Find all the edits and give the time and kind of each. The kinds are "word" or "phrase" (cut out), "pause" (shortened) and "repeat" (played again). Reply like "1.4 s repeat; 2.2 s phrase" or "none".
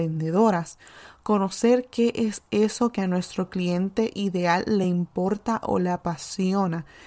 none